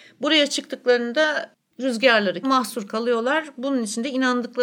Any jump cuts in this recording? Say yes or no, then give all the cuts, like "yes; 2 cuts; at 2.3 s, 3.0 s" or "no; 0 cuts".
yes; 1 cut; at 2.4 s